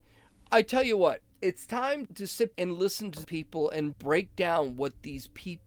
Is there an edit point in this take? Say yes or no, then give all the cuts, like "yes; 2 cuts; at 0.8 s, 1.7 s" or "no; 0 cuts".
yes; 5 cuts; at 1.3 s, 2.1 s, 2.5 s, 3.2 s, 3.9 s